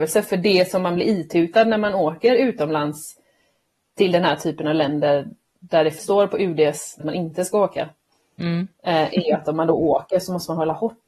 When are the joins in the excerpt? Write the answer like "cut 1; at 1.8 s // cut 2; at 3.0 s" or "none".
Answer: cut 1; at 6.0 s // cut 2; at 7.0 s